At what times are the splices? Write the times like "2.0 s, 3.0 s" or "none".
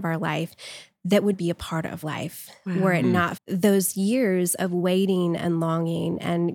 1.3 s, 2.0 s, 3.4 s